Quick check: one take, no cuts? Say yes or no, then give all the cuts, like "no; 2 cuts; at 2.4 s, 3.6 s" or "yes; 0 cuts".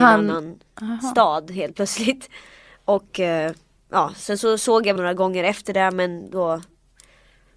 no; 1 cut; at 5.0 s